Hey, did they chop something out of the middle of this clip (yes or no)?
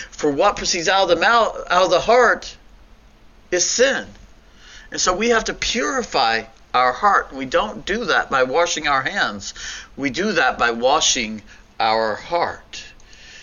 no